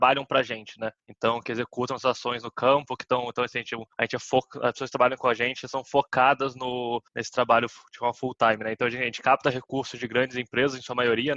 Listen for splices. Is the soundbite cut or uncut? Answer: cut